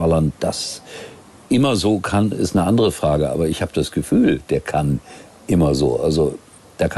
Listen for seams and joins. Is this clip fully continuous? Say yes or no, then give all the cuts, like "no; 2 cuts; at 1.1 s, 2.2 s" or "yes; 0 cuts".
yes; 0 cuts